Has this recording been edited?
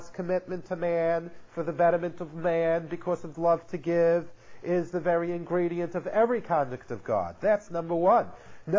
yes; 1 cut; at 3.3 s

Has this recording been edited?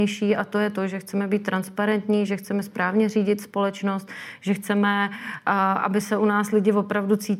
no; 0 cuts

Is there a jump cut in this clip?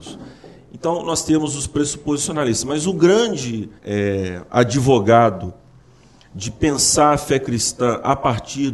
yes; 1 cut; at 3.8 s

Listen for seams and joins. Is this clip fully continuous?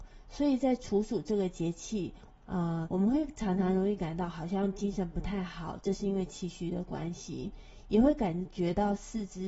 no; 1 cut; at 2.8 s

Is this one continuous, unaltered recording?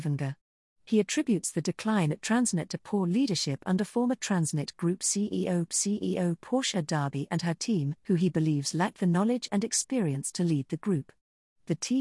no; 2 cuts; at 5.7 s, 8.0 s

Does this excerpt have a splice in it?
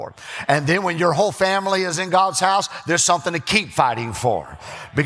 no; 0 cuts

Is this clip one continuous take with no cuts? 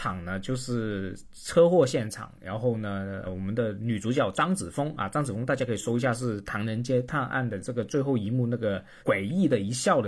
no; 2 cuts; at 3.2 s, 9.0 s

